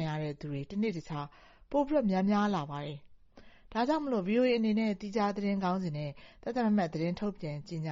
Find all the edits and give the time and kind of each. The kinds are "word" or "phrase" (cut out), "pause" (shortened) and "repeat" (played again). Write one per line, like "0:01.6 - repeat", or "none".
none